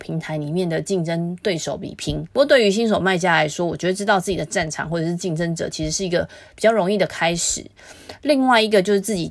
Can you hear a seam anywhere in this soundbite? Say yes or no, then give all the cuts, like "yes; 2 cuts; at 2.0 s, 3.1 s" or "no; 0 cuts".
yes; 1 cut; at 2.3 s